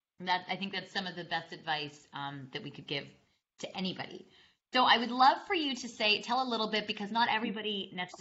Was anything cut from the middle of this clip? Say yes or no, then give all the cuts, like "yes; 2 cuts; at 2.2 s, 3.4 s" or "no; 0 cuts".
no; 0 cuts